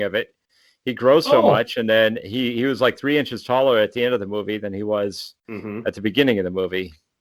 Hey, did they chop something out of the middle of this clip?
yes; 1 cut; at 5.4 s

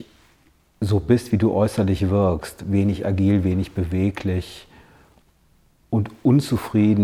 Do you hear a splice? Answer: no; 0 cuts

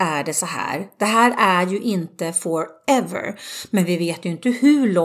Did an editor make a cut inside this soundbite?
no; 0 cuts

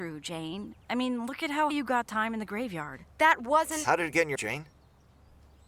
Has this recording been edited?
yes; 3 cuts; at 1.7 s, 2.1 s, 4.4 s

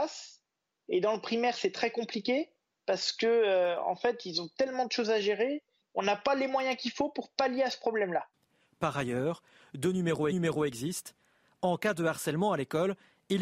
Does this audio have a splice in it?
yes; 1 cut; at 10.3 s

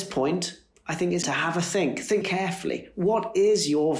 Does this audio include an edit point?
yes; 2 cuts; at 1.2 s, 2.2 s

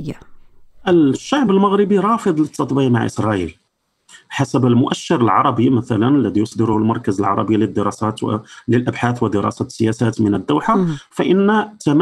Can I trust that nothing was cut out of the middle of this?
yes; 0 cuts

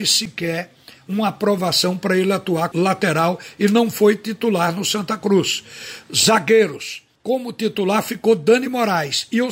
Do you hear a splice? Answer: yes; 2 cuts; at 2.7 s, 7.1 s

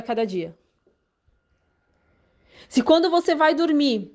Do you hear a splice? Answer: no; 0 cuts

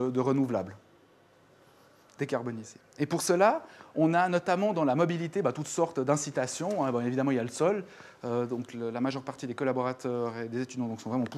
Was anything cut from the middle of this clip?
no; 0 cuts

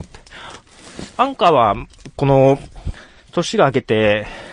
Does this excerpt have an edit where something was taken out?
no; 0 cuts

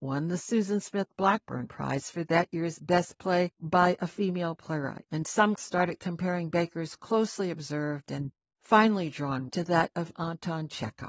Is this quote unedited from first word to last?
no; 2 cuts; at 5.6 s, 9.5 s

